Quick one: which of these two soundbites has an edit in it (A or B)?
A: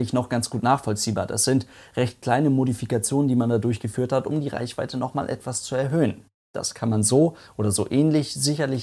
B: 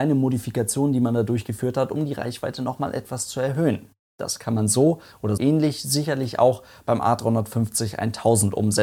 B